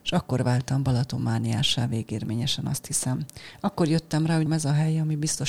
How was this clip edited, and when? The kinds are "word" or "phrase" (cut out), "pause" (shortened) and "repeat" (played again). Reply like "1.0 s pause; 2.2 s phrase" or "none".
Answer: 4.5 s word